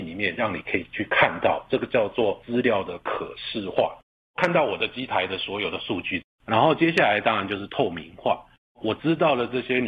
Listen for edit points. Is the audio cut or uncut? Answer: uncut